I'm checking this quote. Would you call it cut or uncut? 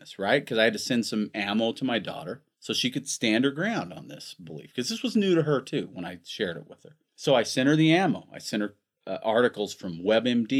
cut